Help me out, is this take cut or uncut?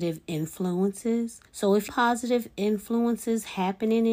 cut